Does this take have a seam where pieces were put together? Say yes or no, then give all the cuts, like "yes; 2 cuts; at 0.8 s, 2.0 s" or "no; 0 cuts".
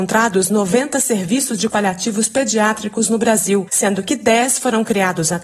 yes; 1 cut; at 1.7 s